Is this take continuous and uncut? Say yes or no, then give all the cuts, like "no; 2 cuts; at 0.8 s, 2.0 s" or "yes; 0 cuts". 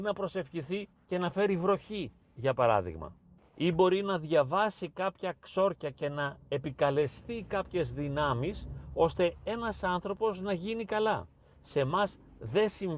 yes; 0 cuts